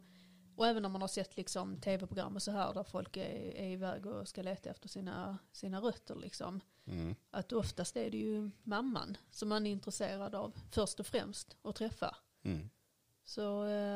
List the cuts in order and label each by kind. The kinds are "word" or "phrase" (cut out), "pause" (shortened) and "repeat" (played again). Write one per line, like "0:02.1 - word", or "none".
none